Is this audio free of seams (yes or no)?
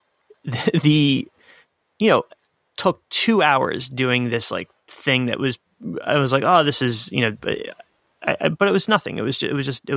yes